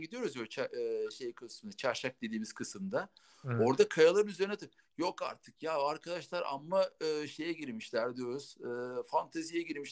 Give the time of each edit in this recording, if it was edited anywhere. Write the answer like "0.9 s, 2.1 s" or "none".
none